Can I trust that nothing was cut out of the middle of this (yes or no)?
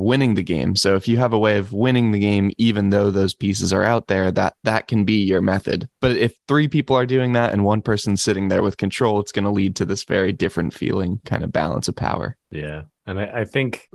no